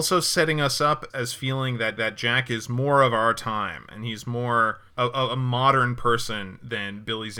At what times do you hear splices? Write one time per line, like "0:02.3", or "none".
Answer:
0:01.1
0:02.0
0:04.9